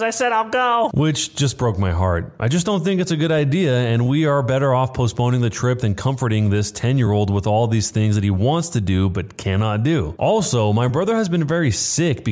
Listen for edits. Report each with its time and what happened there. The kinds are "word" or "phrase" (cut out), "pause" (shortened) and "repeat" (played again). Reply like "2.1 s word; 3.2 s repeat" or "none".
none